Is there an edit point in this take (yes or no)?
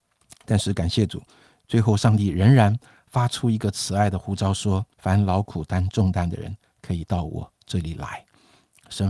yes